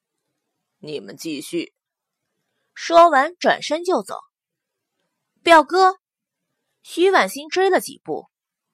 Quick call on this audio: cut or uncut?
uncut